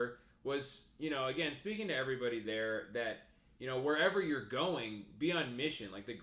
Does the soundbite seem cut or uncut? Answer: uncut